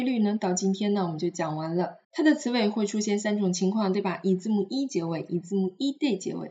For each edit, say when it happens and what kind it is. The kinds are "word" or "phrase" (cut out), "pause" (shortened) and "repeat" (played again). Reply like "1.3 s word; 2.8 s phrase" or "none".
2.0 s pause